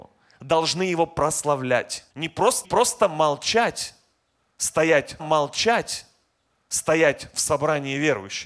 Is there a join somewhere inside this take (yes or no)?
yes